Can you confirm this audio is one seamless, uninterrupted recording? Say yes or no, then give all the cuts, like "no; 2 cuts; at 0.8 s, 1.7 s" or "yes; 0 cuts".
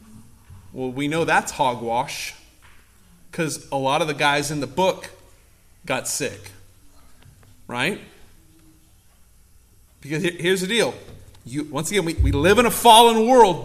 yes; 0 cuts